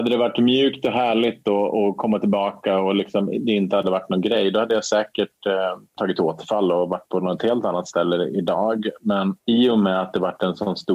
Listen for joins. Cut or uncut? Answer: uncut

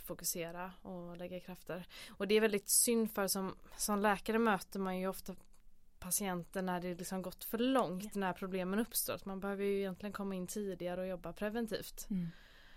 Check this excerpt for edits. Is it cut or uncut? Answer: uncut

